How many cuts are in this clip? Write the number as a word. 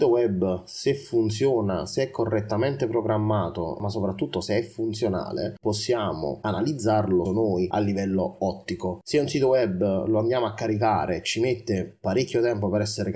two